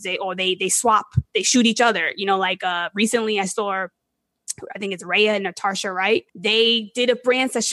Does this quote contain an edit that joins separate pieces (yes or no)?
yes